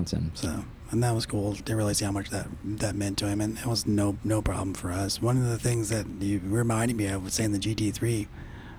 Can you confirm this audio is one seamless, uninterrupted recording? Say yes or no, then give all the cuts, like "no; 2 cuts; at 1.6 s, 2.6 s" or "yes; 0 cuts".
no; 1 cut; at 1.6 s